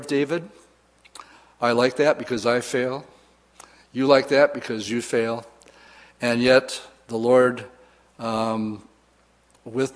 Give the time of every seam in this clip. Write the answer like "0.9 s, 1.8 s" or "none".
none

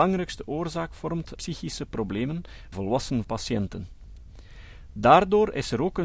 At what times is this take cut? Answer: 1.4 s, 2.7 s, 3.2 s

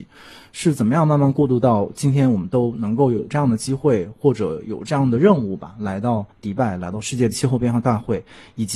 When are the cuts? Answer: 6.3 s

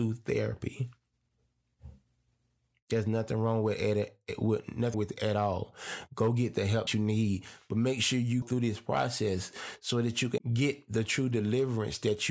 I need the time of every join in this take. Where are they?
4.9 s, 6.9 s, 8.4 s, 10.4 s

